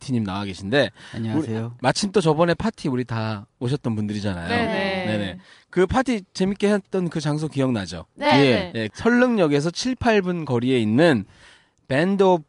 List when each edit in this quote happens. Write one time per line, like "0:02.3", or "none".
none